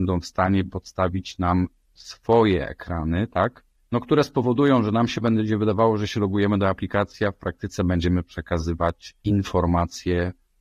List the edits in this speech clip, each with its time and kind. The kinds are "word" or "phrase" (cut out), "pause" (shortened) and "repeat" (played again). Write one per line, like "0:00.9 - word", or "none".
0:03.8 - pause
0:09.2 - pause